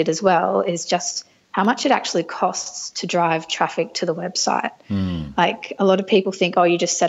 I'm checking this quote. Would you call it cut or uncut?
uncut